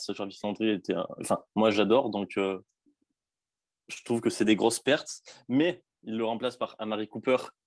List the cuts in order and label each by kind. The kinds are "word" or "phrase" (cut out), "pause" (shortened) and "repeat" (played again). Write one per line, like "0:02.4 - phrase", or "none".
0:01.5 - pause
0:05.9 - pause